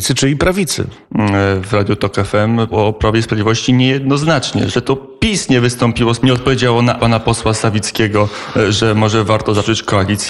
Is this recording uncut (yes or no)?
no